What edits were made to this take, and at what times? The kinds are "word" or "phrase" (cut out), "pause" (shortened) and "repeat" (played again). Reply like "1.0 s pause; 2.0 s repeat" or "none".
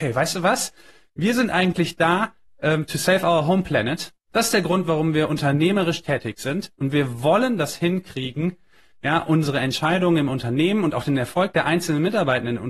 none

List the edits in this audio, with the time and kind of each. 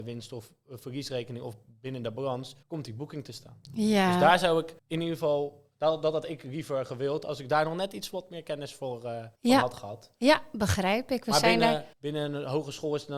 2.6 s pause; 3.6 s pause; 4.8 s pause; 9.4 s pause; 11.9 s pause

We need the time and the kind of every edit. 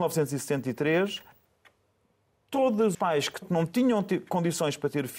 2.9 s word; 3.4 s word

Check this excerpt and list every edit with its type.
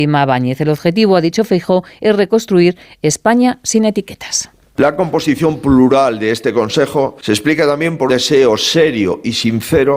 8.1 s word

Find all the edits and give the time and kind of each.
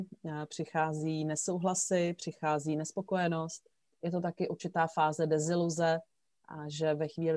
none

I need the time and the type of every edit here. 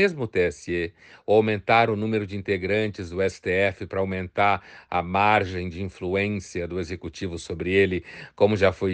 none

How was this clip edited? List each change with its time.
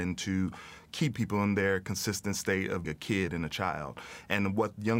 1.1 s word; 2.8 s word

